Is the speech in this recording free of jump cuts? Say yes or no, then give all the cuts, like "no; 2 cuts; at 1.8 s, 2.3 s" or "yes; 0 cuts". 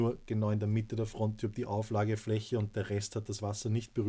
yes; 0 cuts